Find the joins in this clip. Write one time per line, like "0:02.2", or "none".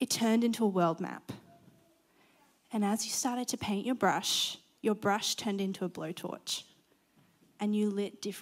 none